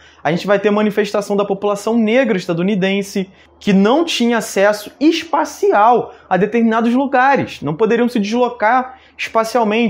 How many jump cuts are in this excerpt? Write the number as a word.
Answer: zero